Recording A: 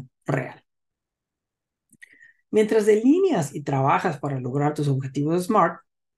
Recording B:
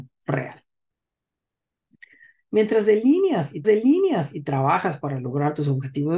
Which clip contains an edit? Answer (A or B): B